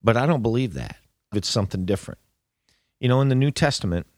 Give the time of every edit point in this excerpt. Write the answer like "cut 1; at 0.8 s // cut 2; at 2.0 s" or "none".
cut 1; at 1.3 s